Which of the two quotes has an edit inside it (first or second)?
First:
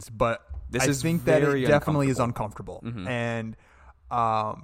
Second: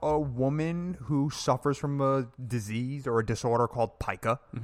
second